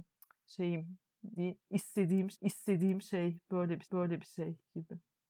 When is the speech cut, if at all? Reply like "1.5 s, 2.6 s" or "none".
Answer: 1.4 s, 2.3 s, 3.8 s